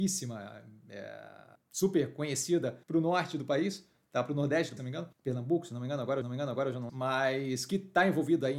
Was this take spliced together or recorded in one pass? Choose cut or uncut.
cut